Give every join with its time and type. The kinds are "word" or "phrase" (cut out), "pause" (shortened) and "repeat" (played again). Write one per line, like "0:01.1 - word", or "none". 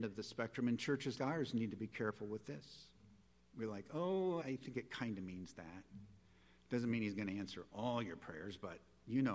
0:01.2 - word
0:04.4 - word